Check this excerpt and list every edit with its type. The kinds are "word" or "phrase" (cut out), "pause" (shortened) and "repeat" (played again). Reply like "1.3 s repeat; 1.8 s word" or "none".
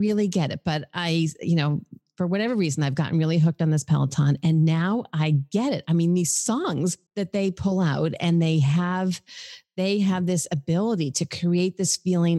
7.1 s pause